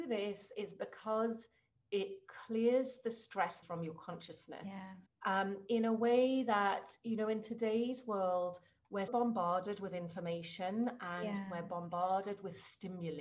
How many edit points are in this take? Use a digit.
3